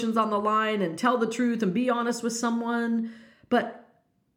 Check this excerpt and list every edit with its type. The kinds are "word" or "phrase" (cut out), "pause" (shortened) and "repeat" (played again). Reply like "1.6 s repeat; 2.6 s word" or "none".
none